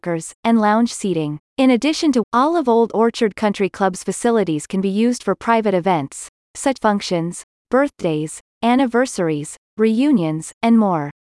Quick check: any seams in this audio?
yes; 3 cuts; at 1.5 s, 2.2 s, 6.8 s

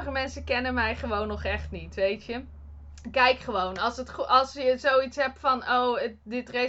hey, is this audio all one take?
yes; 0 cuts

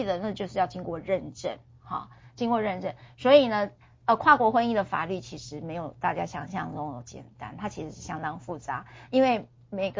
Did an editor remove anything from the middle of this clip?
no; 0 cuts

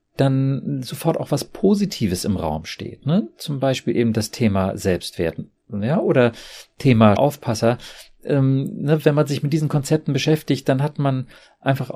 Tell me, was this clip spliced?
yes; 1 cut; at 7.2 s

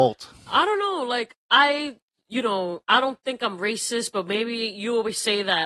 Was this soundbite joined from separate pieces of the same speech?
no; 0 cuts

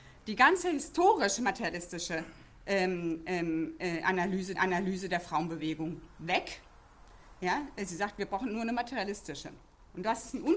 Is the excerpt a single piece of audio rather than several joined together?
no; 1 cut; at 4.5 s

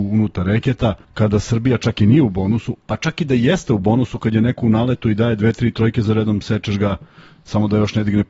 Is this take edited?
yes; 1 cut; at 1.0 s

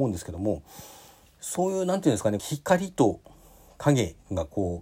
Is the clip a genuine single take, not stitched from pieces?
no; 1 cut; at 2.4 s

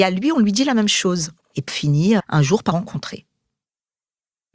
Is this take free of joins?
no; 3 cuts; at 1.7 s, 2.2 s, 2.7 s

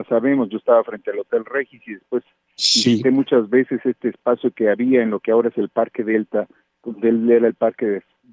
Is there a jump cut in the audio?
no; 0 cuts

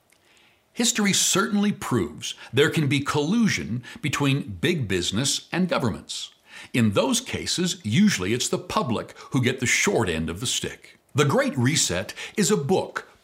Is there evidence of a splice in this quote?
yes; 1 cut; at 11.1 s

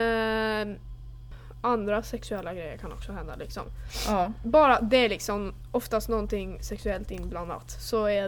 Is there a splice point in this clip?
no; 0 cuts

